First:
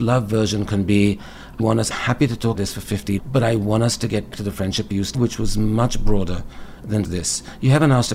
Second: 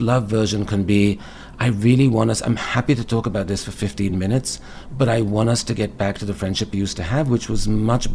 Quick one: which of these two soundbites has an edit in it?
first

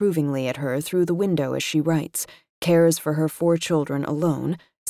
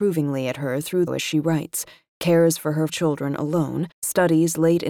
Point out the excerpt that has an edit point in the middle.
second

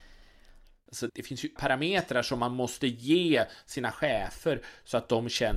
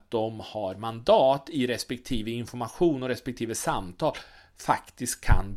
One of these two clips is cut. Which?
first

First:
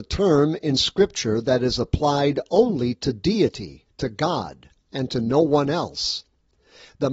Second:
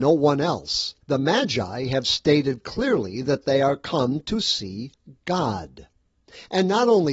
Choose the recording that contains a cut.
second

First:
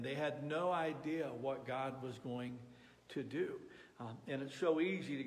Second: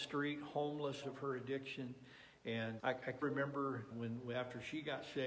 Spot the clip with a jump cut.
second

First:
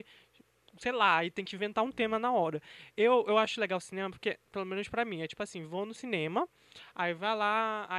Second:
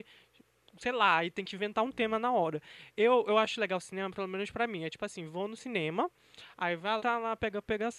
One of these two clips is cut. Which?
second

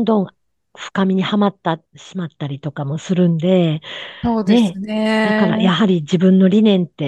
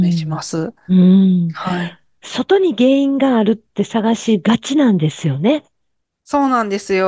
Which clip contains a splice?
first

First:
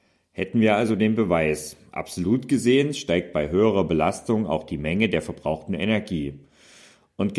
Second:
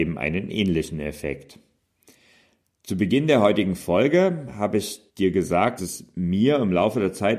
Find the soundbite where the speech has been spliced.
second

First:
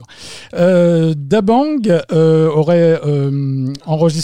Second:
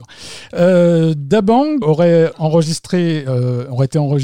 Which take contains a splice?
second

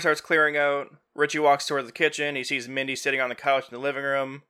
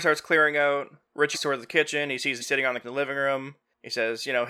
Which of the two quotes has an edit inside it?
second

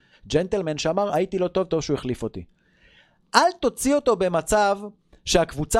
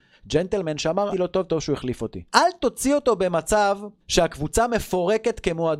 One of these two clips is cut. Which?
second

